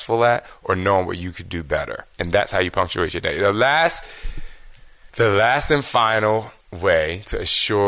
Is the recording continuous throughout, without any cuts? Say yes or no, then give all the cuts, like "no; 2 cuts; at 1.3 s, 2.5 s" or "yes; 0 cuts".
no; 3 cuts; at 2.1 s, 5.1 s, 6.6 s